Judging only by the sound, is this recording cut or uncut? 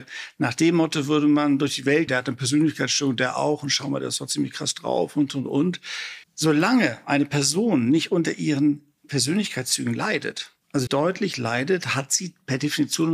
cut